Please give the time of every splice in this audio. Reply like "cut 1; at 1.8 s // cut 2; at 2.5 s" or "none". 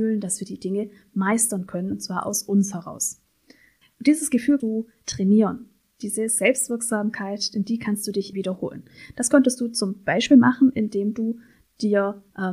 cut 1; at 4.6 s // cut 2; at 8.3 s